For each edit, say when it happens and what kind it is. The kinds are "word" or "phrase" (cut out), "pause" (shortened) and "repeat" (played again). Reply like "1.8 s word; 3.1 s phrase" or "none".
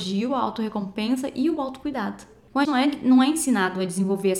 2.6 s word